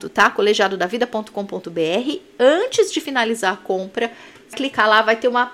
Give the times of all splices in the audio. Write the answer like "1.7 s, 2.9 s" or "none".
4.5 s